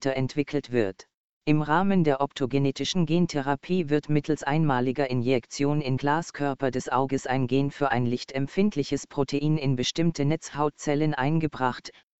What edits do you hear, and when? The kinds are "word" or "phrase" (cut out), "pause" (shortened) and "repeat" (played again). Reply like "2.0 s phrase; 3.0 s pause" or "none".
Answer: 1.2 s pause; 6.0 s word